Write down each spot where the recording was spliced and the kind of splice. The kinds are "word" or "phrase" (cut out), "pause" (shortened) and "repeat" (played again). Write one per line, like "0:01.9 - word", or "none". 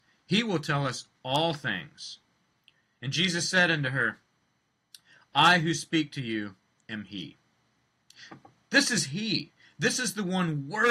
none